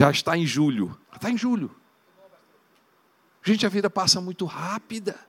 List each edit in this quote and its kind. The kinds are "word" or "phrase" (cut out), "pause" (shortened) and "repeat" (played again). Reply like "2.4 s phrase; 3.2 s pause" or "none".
1.0 s pause